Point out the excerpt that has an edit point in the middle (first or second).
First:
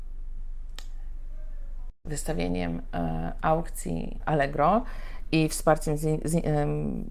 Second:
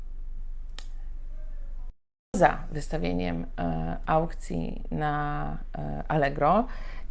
first